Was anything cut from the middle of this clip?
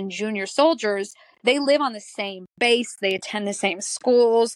no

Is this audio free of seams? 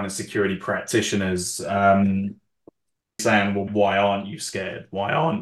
no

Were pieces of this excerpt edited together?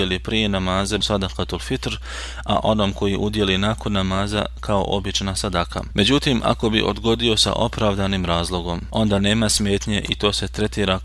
yes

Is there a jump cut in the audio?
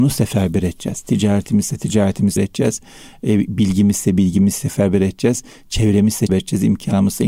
yes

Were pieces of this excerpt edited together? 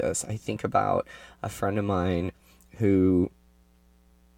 no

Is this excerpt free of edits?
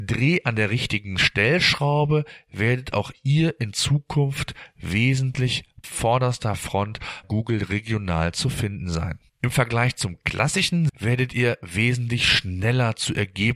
no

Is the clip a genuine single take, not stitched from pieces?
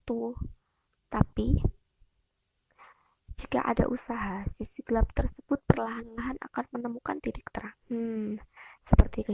no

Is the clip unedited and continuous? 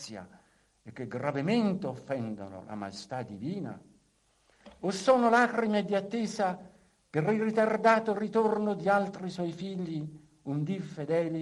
yes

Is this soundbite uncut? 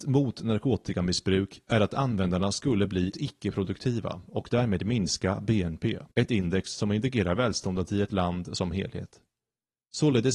no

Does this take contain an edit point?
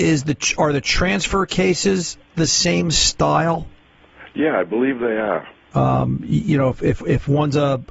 no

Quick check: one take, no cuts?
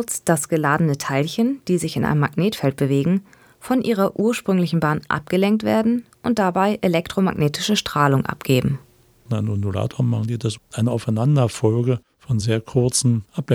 yes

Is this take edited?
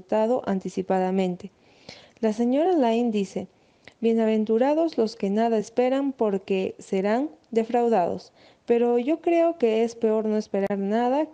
no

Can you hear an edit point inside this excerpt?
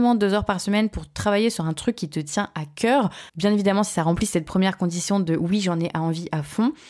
yes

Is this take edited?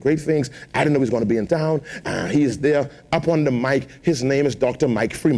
no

